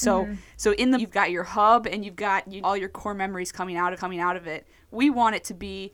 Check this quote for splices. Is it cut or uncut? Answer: cut